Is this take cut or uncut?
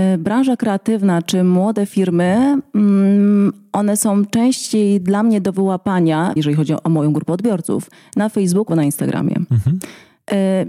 cut